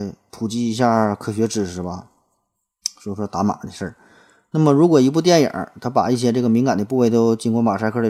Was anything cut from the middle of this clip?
no; 0 cuts

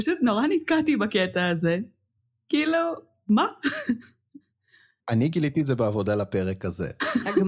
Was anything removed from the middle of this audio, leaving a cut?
no; 0 cuts

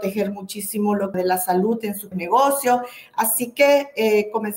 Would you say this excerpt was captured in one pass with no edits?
no; 2 cuts; at 1.1 s, 2.1 s

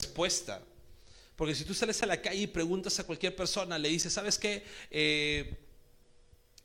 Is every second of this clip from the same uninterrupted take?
yes; 0 cuts

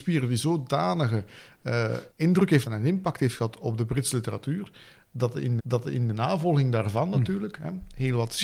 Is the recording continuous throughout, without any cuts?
no; 3 cuts; at 2.1 s, 2.7 s, 5.6 s

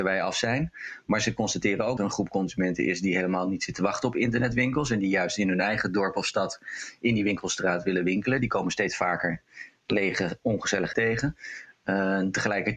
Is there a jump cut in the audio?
yes; 2 cuts; at 2.0 s, 10.9 s

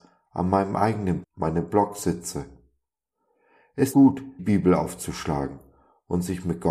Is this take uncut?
no; 3 cuts; at 1.2 s, 3.9 s, 4.4 s

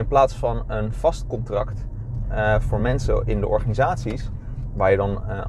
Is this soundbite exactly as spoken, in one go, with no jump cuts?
yes; 0 cuts

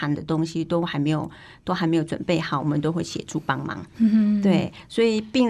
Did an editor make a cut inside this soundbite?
no; 0 cuts

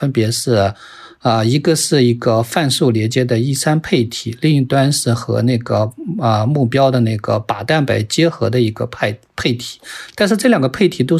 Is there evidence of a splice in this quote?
no; 0 cuts

